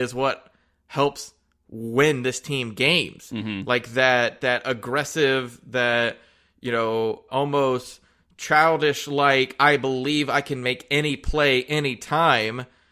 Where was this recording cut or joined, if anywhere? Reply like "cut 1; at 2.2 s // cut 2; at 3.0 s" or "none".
cut 1; at 7.3 s